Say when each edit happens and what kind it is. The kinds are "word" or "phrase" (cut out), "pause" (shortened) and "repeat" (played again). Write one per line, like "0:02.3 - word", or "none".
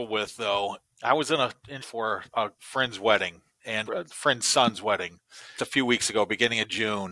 0:00.9 - word
0:01.8 - word
0:02.5 - pause
0:03.9 - word
0:05.6 - word